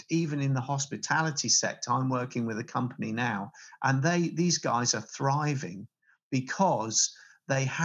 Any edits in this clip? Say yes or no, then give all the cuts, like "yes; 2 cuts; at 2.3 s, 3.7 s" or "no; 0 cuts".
no; 0 cuts